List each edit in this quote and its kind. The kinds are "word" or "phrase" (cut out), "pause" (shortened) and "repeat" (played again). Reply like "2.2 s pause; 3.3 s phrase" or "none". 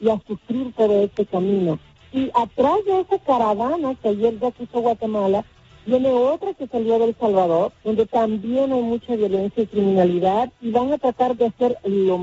7.8 s pause